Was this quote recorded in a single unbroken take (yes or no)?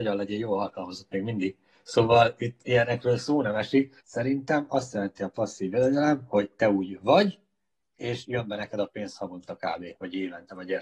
no